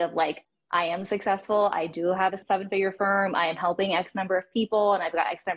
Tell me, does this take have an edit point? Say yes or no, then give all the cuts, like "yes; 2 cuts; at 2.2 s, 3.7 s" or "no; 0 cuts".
no; 0 cuts